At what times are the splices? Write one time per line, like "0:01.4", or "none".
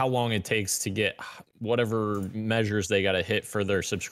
0:01.4